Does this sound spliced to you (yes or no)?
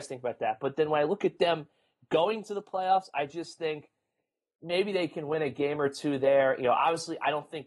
no